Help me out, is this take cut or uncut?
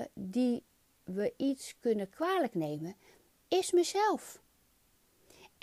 uncut